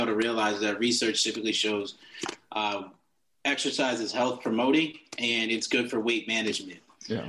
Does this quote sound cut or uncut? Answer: uncut